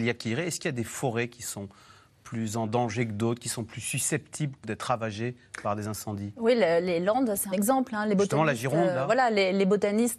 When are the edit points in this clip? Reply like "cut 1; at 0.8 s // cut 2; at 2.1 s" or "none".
cut 1; at 4.6 s // cut 2; at 7.5 s